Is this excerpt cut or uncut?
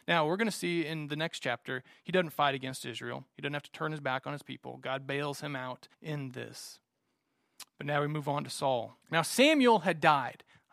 cut